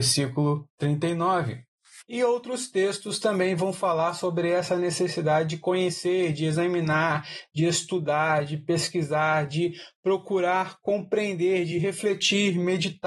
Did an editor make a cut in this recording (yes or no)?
no